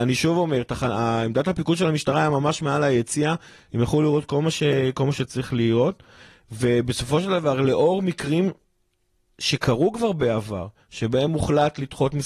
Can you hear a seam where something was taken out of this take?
no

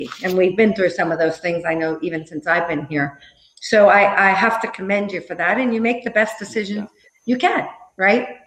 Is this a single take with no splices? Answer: yes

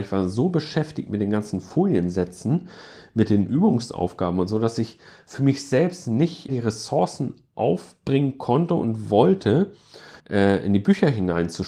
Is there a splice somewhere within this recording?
yes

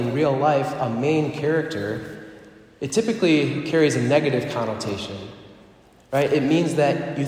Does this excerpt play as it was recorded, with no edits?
yes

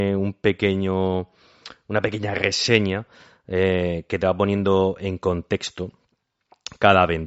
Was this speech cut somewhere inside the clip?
no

